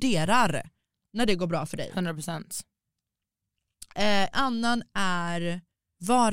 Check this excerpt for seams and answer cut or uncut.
cut